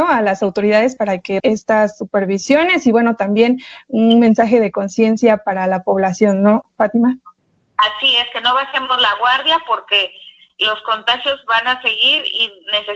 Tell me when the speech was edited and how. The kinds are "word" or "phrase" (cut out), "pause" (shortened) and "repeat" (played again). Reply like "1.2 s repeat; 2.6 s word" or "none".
1.4 s word